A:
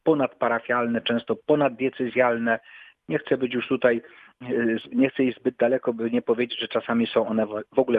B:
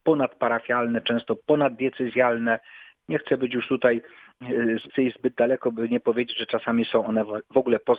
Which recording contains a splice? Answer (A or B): B